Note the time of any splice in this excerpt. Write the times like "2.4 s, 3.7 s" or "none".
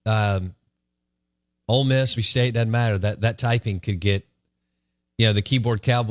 2.2 s